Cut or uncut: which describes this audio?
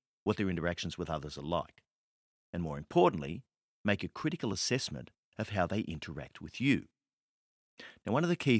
uncut